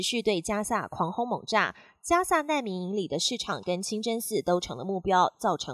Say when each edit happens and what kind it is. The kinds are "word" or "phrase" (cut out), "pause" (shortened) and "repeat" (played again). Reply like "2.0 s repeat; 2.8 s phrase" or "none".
none

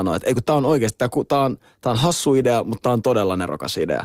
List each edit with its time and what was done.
none

